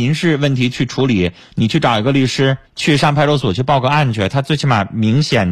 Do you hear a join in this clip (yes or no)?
yes